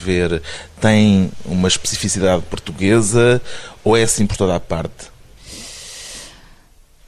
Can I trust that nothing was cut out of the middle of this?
yes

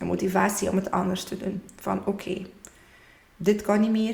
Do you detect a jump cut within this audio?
no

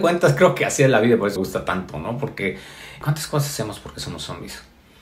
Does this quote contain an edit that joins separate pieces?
yes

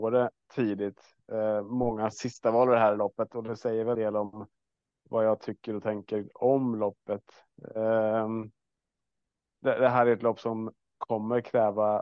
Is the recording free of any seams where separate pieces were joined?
no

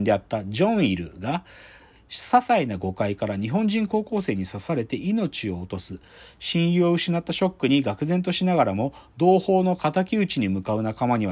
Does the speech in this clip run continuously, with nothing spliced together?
yes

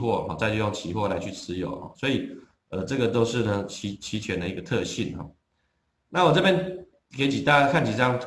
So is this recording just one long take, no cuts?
yes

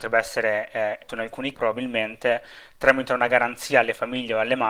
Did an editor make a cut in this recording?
yes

